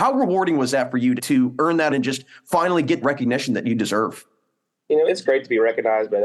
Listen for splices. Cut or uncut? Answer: cut